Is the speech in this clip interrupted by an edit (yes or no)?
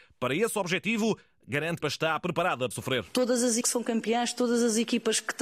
yes